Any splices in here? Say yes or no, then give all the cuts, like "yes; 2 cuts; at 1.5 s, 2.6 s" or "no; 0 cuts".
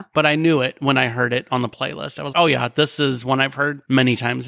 yes; 1 cut; at 2.3 s